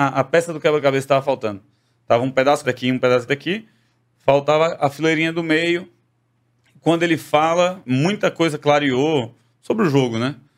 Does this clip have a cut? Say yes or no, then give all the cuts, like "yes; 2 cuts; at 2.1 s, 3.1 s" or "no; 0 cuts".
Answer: yes; 3 cuts; at 2.6 s, 3.3 s, 7.8 s